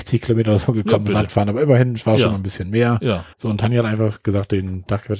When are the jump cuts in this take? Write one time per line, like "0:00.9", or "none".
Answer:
0:03.3